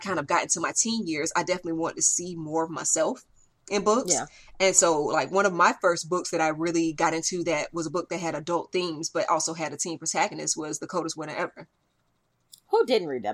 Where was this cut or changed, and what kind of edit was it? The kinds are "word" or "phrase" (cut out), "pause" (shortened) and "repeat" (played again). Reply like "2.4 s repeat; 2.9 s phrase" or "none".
none